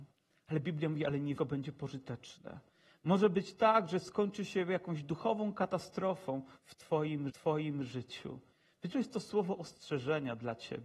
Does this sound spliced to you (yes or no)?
yes